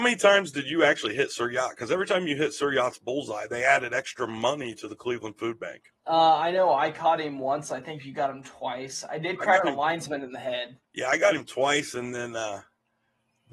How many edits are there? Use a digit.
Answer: 2